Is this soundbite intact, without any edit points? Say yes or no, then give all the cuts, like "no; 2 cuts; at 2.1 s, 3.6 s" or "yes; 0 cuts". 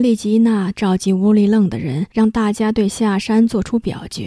no; 1 cut; at 2.1 s